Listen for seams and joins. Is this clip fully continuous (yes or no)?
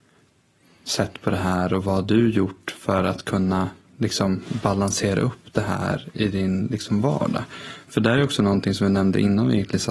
yes